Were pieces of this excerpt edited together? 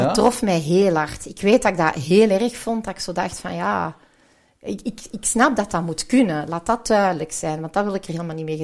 no; 0 cuts

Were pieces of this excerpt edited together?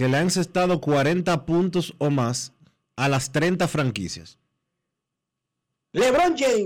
no; 0 cuts

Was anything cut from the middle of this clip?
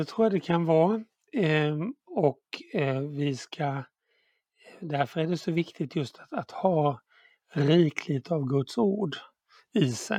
no; 0 cuts

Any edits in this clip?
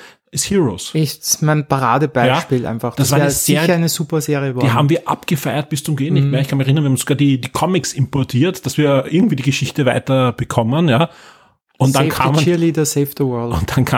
no; 0 cuts

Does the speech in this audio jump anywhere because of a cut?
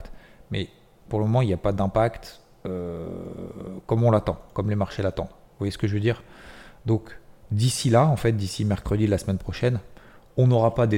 no; 0 cuts

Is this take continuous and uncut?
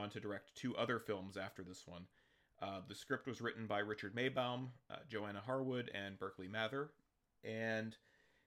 yes; 0 cuts

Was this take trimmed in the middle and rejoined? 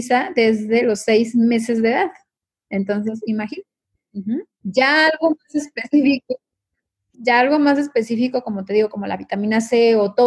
yes; 1 cut; at 7.1 s

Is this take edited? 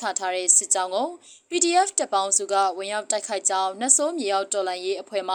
no; 0 cuts

